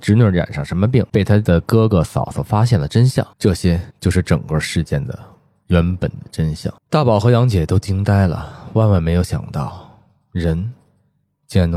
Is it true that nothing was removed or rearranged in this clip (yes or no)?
no